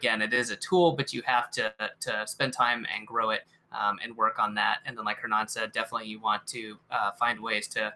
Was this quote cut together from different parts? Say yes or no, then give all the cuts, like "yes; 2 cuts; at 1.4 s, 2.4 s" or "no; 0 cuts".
no; 0 cuts